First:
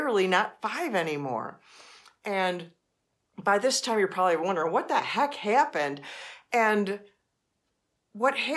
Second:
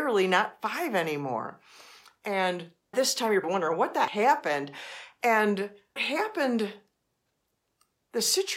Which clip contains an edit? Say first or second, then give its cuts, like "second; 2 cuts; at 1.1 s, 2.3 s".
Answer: second; 4 cuts; at 2.9 s, 3.4 s, 4.1 s, 6.0 s